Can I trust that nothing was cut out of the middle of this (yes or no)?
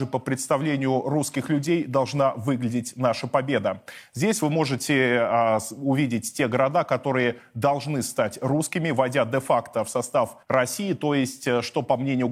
no